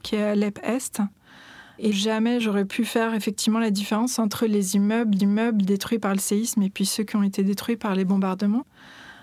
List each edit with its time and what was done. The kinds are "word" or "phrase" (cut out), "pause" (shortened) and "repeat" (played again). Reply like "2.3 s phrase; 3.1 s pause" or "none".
5.2 s repeat